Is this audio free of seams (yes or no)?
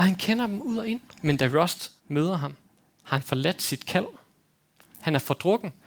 no